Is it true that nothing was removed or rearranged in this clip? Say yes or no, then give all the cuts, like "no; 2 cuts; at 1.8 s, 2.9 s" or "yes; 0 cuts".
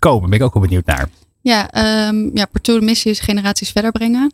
yes; 0 cuts